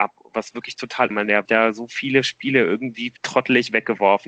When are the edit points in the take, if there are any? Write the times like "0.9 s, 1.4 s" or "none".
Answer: 1.1 s, 1.5 s, 3.2 s